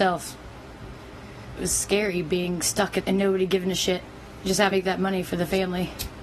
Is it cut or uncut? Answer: cut